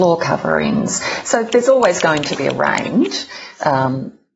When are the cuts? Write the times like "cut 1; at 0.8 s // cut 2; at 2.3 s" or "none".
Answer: none